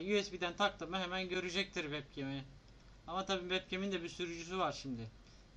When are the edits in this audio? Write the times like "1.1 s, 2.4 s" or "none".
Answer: none